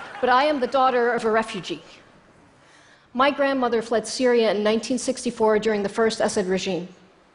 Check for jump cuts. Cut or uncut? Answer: uncut